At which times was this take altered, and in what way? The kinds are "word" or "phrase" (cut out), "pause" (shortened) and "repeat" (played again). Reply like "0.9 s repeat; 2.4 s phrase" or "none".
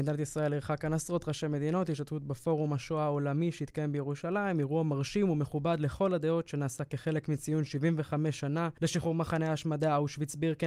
8.8 s pause